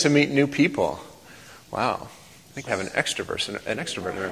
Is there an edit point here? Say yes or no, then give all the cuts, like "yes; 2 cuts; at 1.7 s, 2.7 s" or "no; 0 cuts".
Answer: yes; 1 cut; at 2.7 s